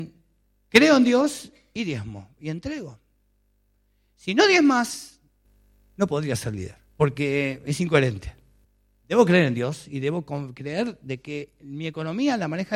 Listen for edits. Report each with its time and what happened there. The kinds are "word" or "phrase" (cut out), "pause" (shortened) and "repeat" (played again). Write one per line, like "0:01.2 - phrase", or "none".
0:06.9 - pause